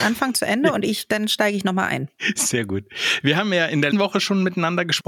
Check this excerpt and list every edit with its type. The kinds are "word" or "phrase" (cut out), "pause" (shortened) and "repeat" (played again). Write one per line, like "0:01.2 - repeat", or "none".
0:03.9 - word